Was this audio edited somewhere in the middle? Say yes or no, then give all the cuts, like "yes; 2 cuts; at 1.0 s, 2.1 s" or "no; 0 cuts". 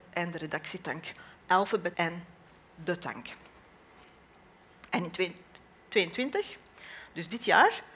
yes; 1 cut; at 1.9 s